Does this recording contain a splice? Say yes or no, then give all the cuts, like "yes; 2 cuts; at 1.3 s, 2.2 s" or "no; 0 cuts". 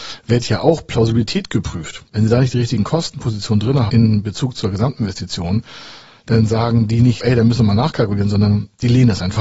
yes; 3 cuts; at 2.1 s, 3.9 s, 7.2 s